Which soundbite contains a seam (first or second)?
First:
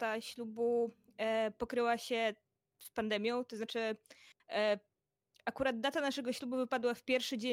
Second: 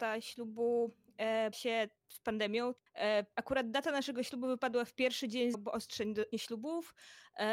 second